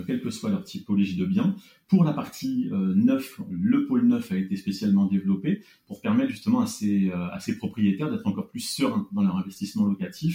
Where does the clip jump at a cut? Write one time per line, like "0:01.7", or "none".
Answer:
none